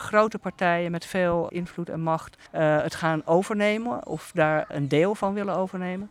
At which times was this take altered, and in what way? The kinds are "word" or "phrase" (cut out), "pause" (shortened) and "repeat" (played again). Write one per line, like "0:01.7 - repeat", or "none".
0:01.5 - word
0:02.5 - pause
0:04.7 - word